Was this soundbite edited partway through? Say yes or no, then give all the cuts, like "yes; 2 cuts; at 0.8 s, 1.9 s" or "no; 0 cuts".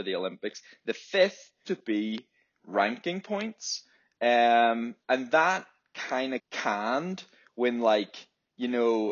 yes; 3 cuts; at 1.6 s, 5.0 s, 6.4 s